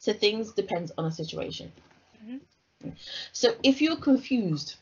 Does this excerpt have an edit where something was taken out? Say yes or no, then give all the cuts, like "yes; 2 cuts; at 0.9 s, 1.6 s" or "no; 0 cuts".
no; 0 cuts